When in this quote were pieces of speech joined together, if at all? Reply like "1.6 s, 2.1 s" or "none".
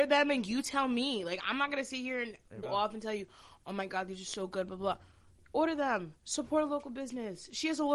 2.6 s